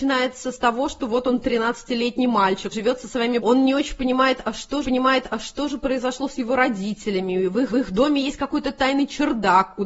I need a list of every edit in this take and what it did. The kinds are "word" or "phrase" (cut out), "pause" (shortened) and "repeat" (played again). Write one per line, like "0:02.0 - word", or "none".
0:02.7 - word
0:03.4 - phrase
0:04.8 - repeat
0:07.7 - repeat